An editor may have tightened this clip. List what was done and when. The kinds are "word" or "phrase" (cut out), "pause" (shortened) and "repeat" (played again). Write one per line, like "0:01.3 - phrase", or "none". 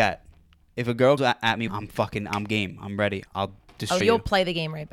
0:01.2 - word
0:01.7 - phrase
0:04.0 - word